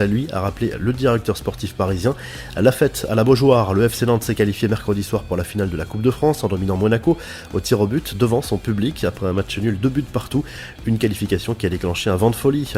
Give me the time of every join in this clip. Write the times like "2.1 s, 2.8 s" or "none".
none